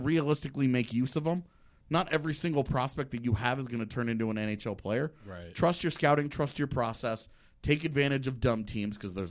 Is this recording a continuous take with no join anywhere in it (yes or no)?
yes